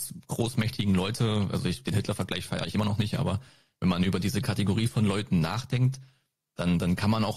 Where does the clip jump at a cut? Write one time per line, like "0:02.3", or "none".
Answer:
none